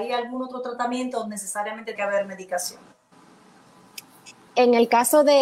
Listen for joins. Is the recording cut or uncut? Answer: cut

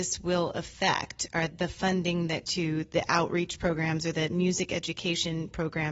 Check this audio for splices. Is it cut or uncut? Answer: cut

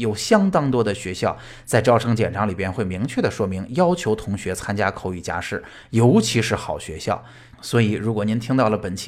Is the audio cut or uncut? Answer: uncut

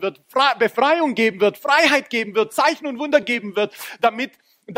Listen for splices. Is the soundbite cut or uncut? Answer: uncut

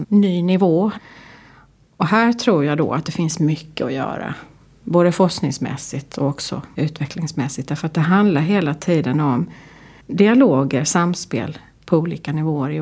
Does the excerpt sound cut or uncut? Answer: uncut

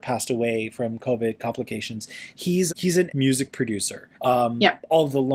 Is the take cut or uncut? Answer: cut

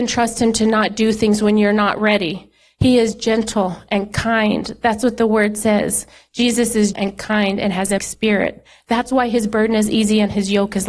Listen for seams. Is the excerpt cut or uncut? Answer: cut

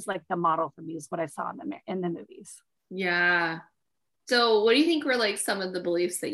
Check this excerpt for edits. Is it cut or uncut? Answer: cut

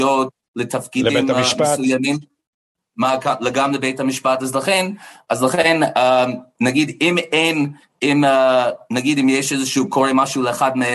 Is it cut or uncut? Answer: uncut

